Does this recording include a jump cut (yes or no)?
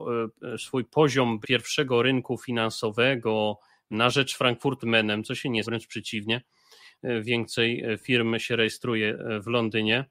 yes